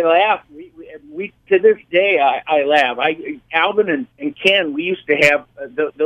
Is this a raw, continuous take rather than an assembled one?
no; 1 cut; at 4.1 s

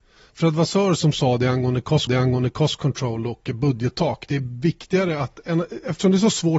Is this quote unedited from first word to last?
no; 1 cut; at 2.1 s

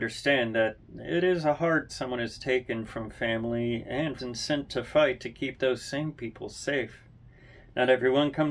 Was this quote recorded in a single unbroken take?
no; 2 cuts; at 1.9 s, 4.2 s

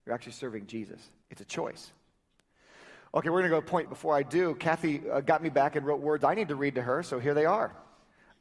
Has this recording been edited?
yes; 2 cuts; at 1.2 s, 3.9 s

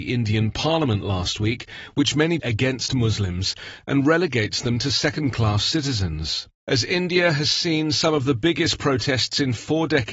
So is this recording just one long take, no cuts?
no; 2 cuts; at 2.4 s, 6.5 s

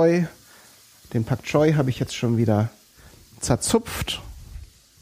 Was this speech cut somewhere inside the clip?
no; 0 cuts

